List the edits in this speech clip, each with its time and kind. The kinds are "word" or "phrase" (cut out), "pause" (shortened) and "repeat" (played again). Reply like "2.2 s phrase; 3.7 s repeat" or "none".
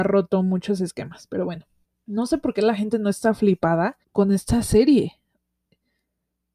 1.8 s pause; 4.0 s pause